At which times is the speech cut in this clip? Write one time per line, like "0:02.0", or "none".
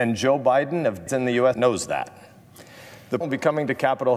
0:01.1
0:01.5
0:03.2